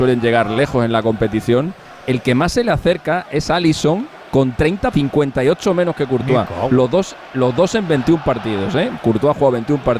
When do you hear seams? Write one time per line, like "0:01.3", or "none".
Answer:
0:04.9